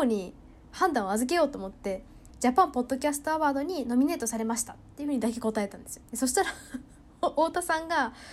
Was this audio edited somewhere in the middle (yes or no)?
yes